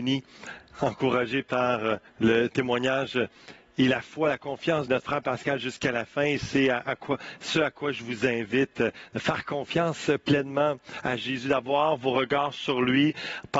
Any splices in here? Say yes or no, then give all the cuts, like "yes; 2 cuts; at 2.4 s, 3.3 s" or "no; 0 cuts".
yes; 2 cuts; at 2.1 s, 4.9 s